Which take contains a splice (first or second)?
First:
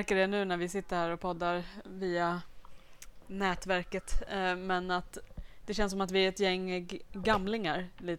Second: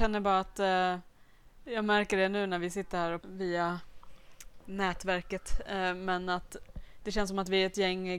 second